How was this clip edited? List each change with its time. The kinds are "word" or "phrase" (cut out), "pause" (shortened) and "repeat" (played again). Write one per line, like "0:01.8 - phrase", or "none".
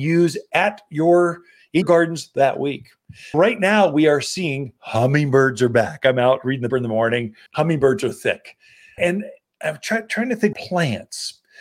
0:01.8 - word
0:03.3 - word
0:06.7 - word
0:07.5 - pause
0:09.0 - word
0:10.5 - word

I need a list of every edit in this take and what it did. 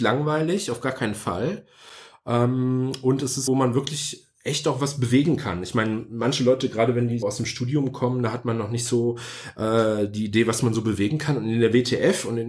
0:03.5 - phrase
0:07.2 - word

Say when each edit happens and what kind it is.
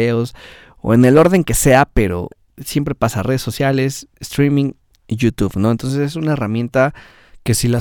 none

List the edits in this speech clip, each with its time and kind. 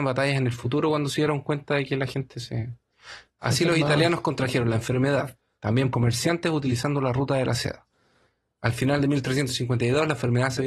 0:05.9 - phrase

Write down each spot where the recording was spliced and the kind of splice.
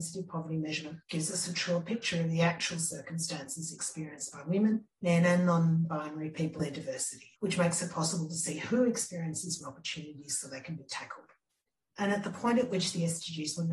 0:01.0 - pause
0:06.6 - phrase
0:07.4 - pause
0:09.6 - phrase

